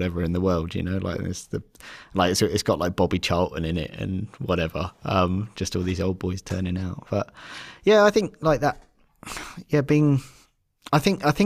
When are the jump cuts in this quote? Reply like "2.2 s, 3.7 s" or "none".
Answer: none